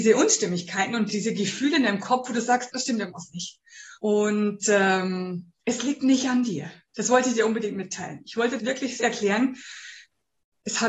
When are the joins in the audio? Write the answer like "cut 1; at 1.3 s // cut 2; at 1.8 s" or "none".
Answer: cut 1; at 1.1 s // cut 2; at 2.7 s // cut 3; at 4.0 s // cut 4; at 5.6 s // cut 5; at 8.6 s // cut 6; at 9.0 s